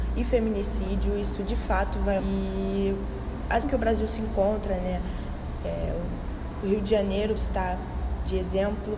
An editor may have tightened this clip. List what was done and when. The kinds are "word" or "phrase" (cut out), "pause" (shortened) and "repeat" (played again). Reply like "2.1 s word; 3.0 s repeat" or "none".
2.2 s word; 3.6 s word; 7.4 s word